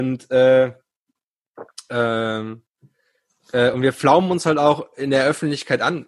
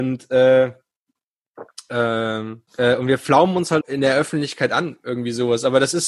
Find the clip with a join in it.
second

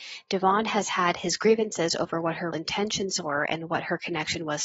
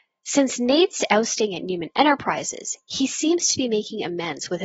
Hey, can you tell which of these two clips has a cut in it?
first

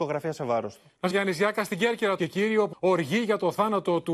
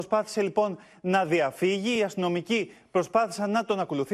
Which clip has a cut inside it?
first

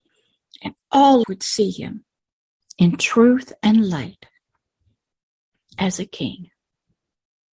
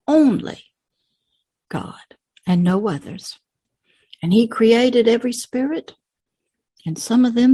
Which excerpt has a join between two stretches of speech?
first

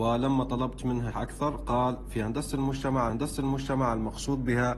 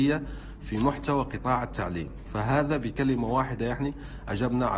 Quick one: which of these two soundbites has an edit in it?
first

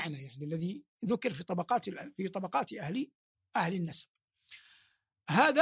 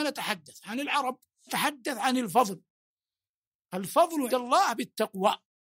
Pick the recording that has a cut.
second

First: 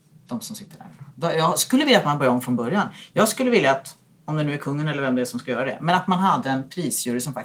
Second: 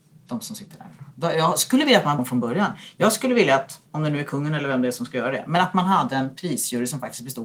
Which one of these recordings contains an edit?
second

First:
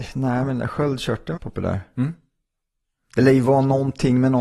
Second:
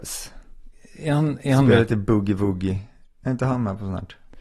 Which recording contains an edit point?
first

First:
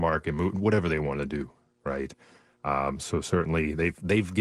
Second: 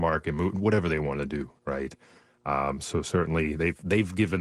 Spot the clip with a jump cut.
second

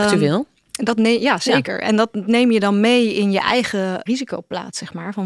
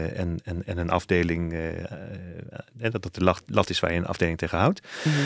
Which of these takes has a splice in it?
first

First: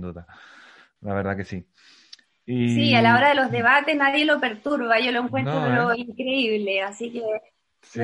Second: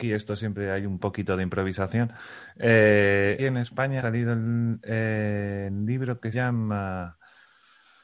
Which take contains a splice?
second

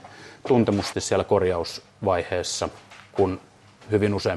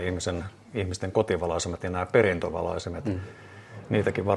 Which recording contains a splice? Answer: first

